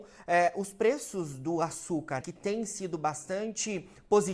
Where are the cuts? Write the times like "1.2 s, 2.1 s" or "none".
2.2 s